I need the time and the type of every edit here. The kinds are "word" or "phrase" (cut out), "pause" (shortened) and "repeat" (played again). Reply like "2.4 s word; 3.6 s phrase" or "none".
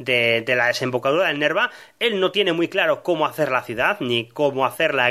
none